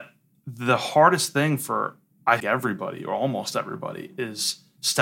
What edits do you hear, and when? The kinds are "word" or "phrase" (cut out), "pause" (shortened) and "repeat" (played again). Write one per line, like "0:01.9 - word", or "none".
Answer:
0:02.4 - word